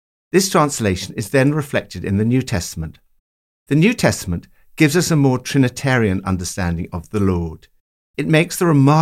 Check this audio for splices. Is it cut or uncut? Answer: uncut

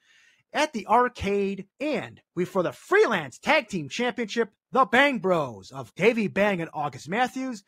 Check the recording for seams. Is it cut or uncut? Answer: cut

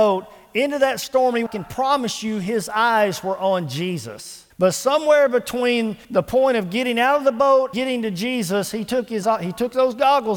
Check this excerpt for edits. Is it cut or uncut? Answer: cut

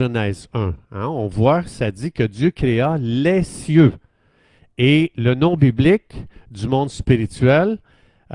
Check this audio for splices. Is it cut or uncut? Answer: uncut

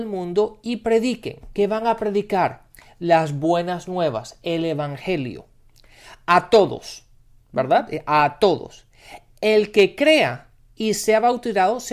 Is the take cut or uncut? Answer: uncut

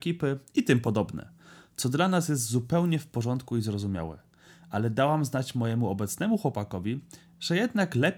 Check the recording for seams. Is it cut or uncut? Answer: uncut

